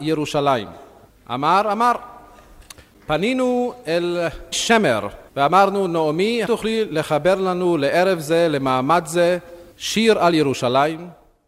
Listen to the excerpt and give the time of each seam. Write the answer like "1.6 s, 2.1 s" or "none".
4.5 s, 5.3 s, 6.4 s, 9.7 s